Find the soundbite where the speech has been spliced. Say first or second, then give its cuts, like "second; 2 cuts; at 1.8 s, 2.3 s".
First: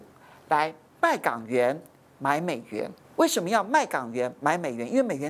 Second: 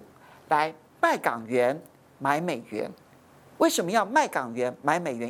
first; 1 cut; at 3.0 s